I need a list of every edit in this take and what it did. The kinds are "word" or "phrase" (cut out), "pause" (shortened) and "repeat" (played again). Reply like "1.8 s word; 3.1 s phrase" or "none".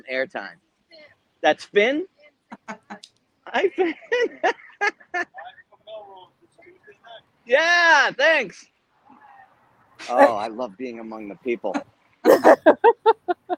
none